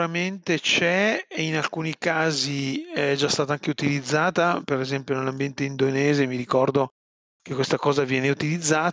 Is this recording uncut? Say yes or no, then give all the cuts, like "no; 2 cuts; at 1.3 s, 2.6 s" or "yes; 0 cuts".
yes; 0 cuts